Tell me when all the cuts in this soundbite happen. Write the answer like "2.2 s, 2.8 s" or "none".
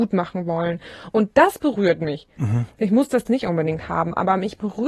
3.3 s